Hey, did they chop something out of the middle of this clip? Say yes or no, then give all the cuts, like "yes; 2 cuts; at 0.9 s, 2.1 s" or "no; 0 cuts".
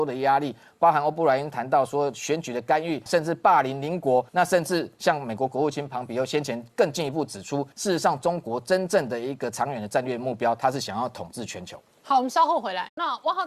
yes; 3 cuts; at 3.1 s, 4.3 s, 7.7 s